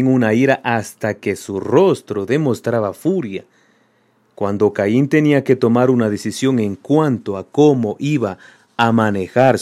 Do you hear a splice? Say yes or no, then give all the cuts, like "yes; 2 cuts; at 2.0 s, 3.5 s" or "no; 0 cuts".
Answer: no; 0 cuts